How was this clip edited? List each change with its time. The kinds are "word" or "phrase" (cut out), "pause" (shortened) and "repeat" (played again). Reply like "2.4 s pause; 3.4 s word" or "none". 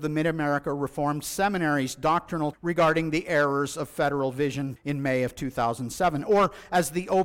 2.5 s word; 4.8 s word